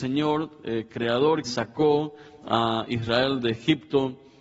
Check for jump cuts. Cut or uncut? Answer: cut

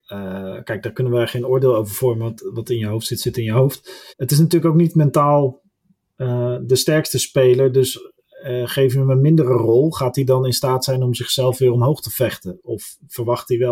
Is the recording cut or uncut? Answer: cut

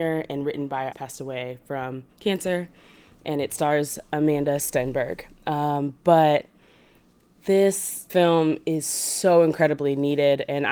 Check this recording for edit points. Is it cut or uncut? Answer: cut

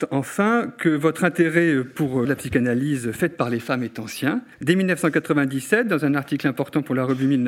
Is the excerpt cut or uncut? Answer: cut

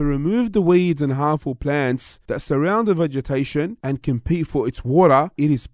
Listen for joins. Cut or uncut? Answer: uncut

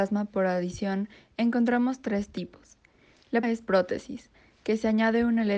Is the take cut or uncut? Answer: cut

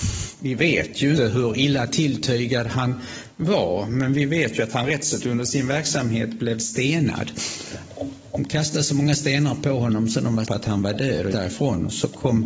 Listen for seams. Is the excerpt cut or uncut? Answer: cut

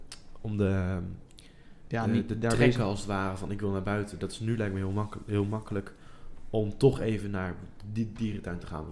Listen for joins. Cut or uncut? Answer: uncut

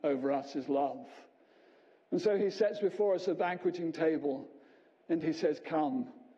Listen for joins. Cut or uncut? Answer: uncut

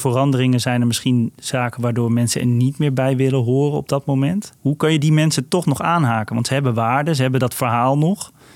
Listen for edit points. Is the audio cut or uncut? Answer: cut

